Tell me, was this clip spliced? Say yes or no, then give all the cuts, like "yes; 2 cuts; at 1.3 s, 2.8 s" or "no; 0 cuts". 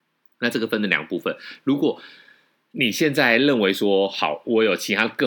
no; 0 cuts